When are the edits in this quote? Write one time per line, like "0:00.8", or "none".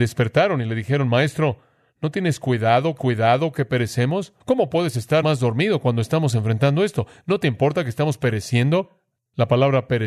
0:03.0
0:04.4
0:05.2